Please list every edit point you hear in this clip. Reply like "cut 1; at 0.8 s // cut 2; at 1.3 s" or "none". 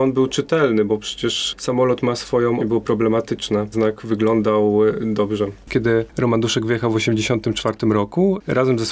cut 1; at 2.6 s // cut 2; at 3.7 s // cut 3; at 5.6 s